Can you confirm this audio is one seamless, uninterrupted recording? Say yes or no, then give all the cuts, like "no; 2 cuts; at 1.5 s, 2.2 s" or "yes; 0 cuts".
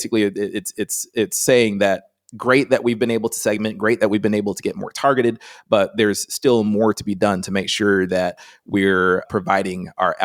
no; 1 cut; at 9.3 s